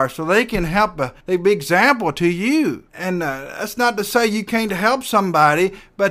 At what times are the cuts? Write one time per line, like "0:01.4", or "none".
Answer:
0:01.2
0:02.9